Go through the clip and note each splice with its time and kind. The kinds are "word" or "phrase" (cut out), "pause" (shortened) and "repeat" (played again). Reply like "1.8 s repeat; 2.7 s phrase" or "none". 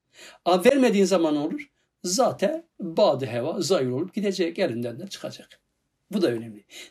none